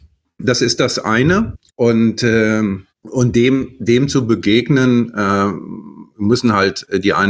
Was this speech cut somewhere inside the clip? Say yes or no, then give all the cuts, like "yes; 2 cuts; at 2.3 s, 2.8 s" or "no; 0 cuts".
yes; 2 cuts; at 2.9 s, 6.1 s